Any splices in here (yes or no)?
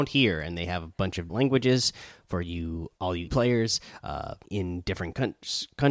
yes